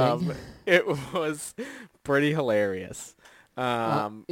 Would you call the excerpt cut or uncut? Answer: uncut